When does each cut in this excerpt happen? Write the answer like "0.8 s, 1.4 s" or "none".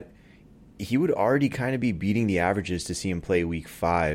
none

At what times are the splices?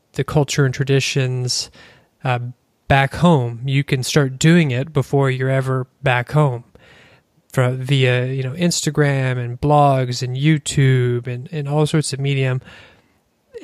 none

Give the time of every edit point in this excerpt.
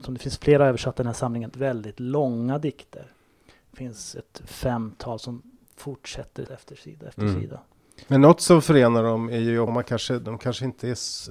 1.5 s, 6.5 s, 9.7 s

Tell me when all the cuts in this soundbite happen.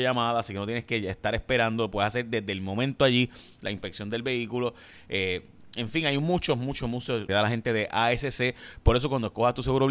7.3 s

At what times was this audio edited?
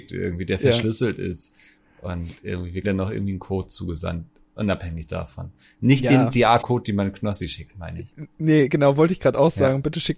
2.8 s, 6.6 s

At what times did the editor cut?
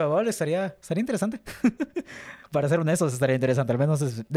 none

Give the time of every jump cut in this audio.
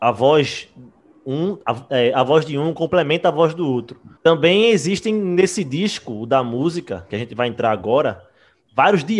1.6 s, 4.2 s

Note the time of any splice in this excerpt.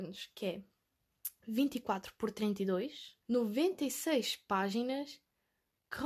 3.2 s

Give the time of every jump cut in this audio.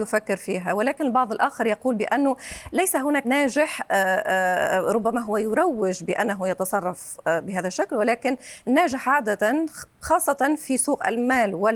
3.2 s

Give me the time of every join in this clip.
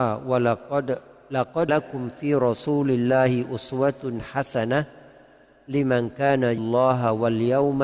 1.7 s, 6.6 s

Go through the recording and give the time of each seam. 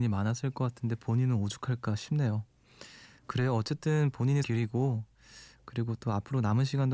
4.4 s

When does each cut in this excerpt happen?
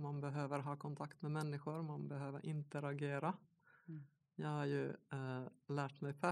none

